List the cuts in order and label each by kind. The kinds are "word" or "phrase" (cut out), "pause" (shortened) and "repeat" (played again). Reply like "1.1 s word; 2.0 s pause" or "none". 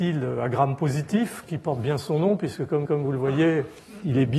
2.9 s repeat